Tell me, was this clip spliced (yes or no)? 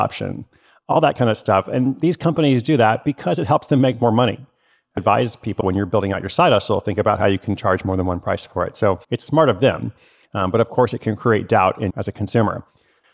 yes